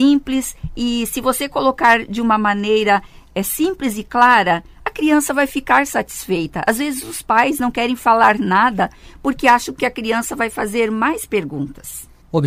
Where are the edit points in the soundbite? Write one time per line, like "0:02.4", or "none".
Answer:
none

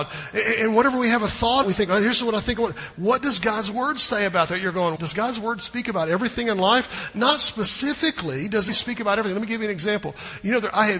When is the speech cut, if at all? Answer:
0:01.6
0:05.0
0:08.7

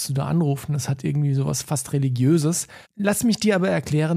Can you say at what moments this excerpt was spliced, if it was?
0:02.8

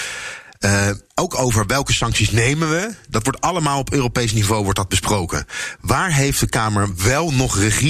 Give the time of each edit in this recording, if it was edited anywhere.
0:01.0

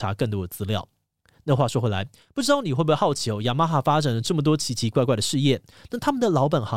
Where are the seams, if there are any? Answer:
none

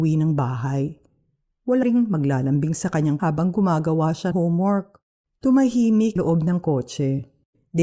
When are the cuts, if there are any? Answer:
0:01.8
0:03.2
0:04.3
0:06.2

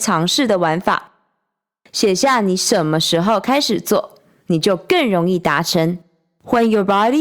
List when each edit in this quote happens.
none

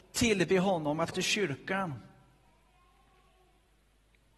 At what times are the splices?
0:01.1

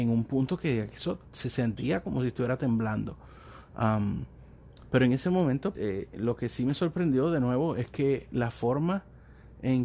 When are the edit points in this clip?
0:05.7

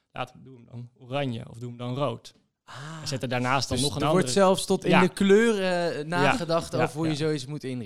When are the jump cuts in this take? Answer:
none

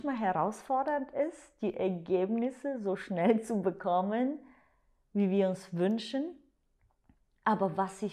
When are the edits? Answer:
none

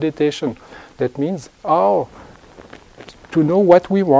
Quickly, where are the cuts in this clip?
0:01.5

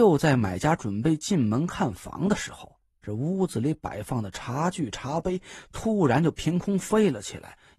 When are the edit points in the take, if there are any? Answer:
0:02.9

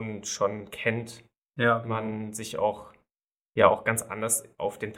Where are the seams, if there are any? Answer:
none

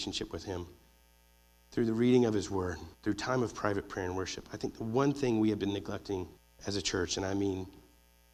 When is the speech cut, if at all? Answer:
0:02.9
0:06.4

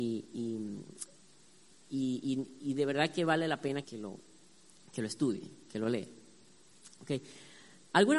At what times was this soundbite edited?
0:03.8

